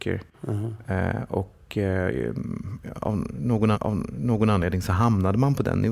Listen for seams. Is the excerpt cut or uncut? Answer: cut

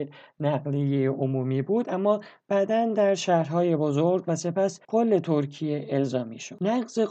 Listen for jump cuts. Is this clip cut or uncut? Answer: cut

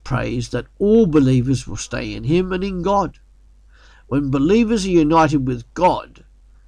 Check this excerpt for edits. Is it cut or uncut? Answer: uncut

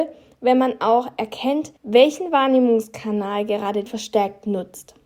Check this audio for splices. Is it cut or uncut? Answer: cut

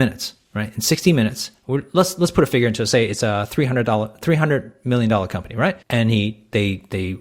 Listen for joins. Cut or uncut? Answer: cut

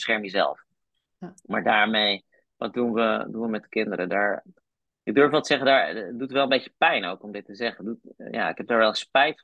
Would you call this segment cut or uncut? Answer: uncut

